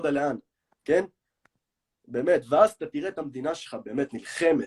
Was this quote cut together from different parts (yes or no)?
no